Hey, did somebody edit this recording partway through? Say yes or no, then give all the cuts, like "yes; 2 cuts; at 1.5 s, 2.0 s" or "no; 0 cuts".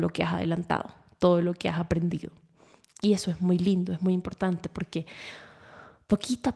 no; 0 cuts